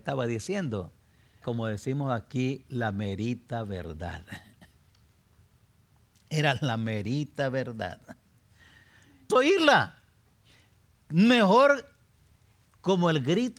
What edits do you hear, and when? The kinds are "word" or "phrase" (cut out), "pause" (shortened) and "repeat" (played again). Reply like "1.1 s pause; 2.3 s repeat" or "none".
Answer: 1.4 s word; 9.3 s phrase

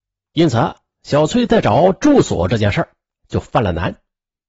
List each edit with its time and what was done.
none

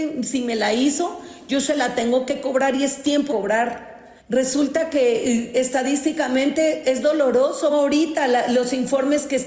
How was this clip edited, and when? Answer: 3.3 s word; 4.2 s pause; 7.7 s phrase

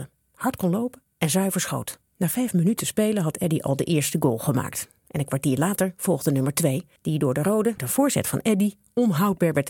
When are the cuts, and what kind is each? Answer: 2.1 s pause; 7.0 s pause; 7.8 s word

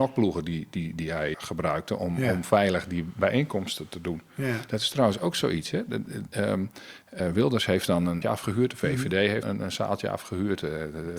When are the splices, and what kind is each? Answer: 1.3 s word; 7.2 s word; 8.2 s word; 9.4 s word

